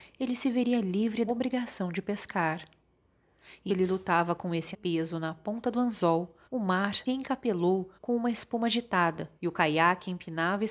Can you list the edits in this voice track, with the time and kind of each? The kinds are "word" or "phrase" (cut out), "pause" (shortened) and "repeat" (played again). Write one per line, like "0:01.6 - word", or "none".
0:01.3 - word
0:03.7 - word
0:04.7 - word
0:06.4 - pause
0:07.1 - word
0:07.9 - pause
0:09.4 - pause